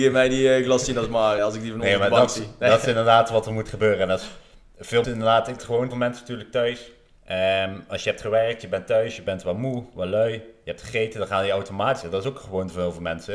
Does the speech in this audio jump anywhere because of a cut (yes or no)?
yes